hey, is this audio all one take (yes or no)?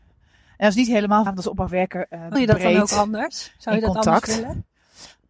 no